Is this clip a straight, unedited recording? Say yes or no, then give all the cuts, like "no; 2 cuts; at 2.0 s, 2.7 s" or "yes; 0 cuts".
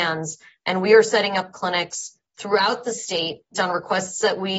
no; 1 cut; at 3.5 s